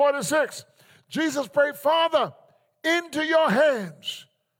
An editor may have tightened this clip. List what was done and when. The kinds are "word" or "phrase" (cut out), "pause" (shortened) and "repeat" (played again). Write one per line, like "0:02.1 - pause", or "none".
none